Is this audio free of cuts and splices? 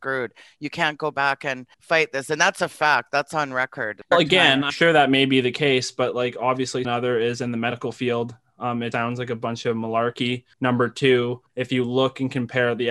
no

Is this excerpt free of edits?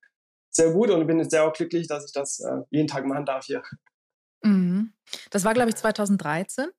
yes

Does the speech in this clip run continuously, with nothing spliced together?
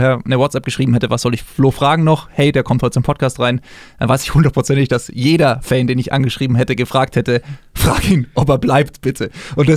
yes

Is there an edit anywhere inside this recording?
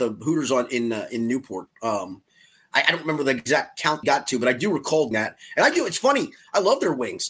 yes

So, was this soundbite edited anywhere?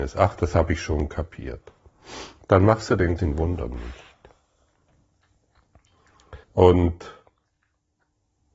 yes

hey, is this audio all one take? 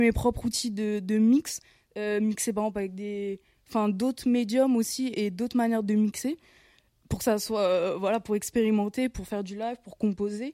yes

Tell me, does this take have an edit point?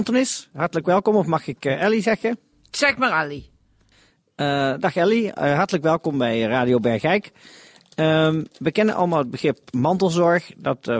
no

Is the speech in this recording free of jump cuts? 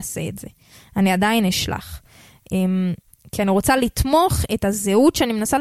yes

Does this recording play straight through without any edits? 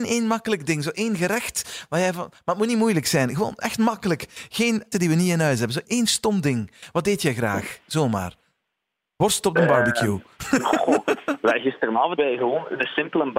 no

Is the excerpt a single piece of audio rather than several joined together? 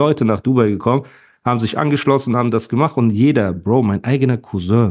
yes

